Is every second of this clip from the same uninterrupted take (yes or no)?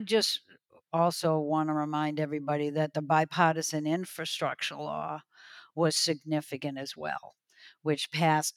yes